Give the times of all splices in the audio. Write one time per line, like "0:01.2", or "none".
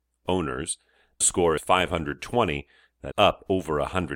0:01.2
0:01.6
0:03.1

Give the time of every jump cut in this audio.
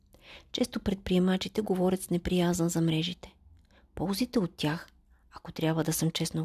none

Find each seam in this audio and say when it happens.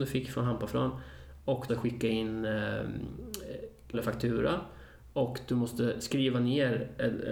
0:01.7
0:03.9

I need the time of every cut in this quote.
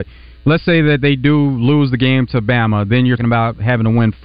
0:03.2

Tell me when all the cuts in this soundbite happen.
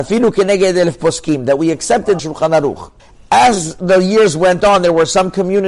0:02.2
0:03.0

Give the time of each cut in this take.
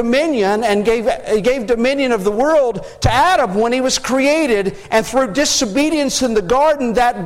none

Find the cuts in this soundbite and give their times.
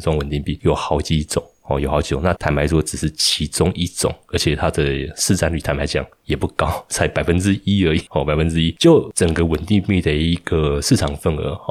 0:02.4

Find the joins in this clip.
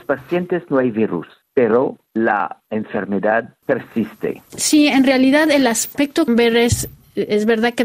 0:06.3

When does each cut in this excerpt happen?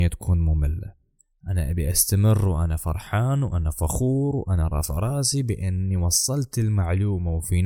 none

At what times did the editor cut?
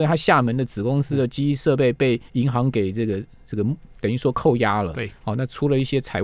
0:02.3

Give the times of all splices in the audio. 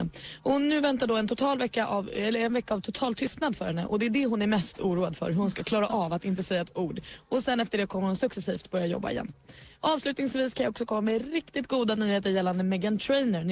none

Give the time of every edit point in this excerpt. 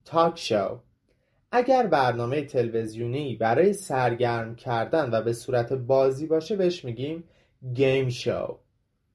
none

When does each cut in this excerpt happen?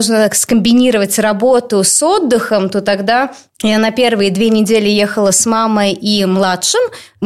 none

